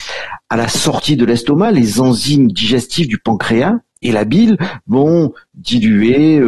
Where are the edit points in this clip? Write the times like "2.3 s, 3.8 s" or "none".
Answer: none